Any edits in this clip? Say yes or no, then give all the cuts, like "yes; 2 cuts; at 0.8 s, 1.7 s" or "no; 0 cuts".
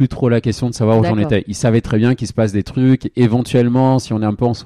no; 0 cuts